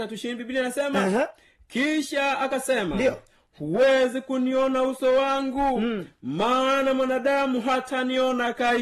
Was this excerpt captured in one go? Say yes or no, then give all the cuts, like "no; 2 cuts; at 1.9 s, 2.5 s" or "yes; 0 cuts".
yes; 0 cuts